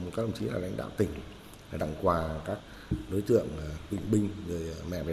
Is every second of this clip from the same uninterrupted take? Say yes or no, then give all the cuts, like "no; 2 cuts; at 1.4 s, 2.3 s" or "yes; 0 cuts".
no; 2 cuts; at 1.8 s, 3.9 s